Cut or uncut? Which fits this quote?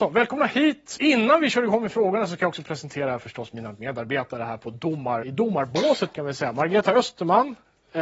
cut